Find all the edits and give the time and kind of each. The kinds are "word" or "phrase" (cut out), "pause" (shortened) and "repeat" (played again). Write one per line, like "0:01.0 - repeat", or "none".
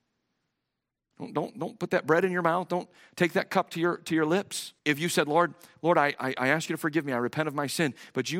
0:04.8 - pause